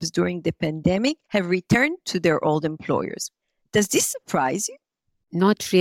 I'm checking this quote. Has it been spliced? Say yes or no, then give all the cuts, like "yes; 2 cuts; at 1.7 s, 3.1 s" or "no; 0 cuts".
yes; 2 cuts; at 1.2 s, 3.4 s